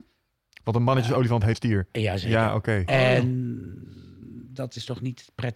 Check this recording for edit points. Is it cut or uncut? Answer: cut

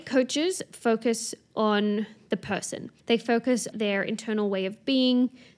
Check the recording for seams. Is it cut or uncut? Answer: cut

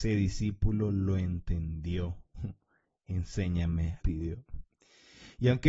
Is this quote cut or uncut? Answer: cut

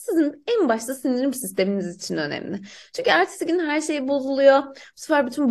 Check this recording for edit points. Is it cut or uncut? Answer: uncut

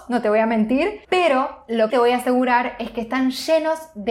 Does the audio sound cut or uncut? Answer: cut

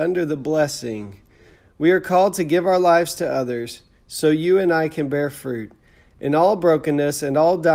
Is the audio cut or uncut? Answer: uncut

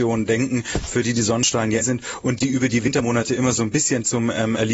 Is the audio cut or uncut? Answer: cut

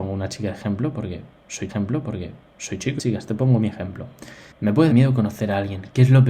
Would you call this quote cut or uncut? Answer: cut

